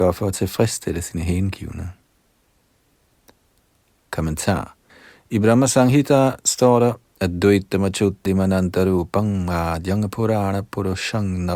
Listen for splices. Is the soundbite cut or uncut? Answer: cut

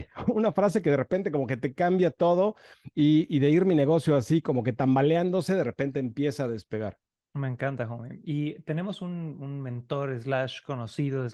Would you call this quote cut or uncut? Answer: uncut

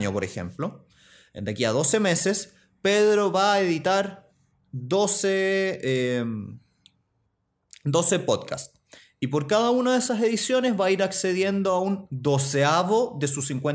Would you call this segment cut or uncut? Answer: uncut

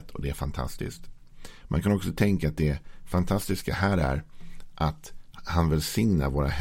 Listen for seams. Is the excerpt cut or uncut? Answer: uncut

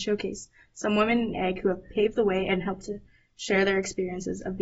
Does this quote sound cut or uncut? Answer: uncut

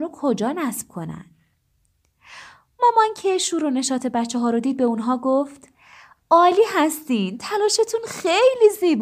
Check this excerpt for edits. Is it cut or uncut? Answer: uncut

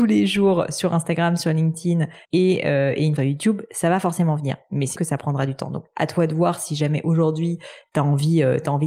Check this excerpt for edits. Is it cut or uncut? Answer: cut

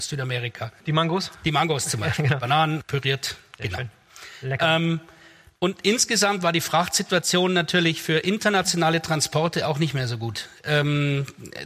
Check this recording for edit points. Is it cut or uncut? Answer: uncut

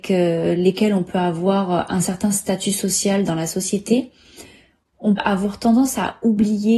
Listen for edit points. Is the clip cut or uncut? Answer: cut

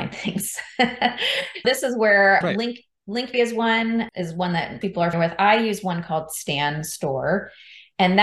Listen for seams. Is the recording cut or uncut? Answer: cut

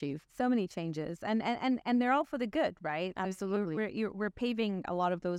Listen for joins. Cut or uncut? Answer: uncut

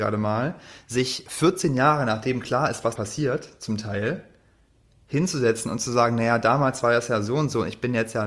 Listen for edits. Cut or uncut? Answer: cut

